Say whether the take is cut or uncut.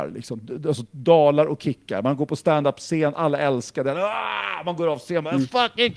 uncut